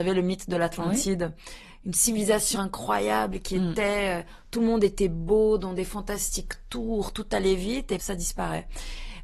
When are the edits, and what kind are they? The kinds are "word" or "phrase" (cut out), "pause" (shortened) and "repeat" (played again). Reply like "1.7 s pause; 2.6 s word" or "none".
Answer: 2.5 s word; 8.0 s word